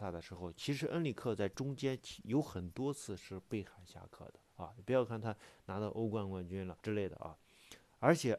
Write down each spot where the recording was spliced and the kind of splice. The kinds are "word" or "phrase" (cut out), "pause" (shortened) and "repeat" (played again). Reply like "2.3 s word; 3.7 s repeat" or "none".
4.4 s pause; 6.8 s pause